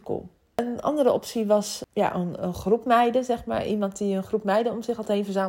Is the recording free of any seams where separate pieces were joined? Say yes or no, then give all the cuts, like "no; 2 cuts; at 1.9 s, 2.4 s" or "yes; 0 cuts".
yes; 0 cuts